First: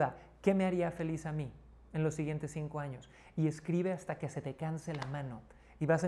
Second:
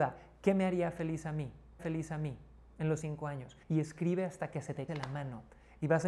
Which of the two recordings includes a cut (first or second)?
second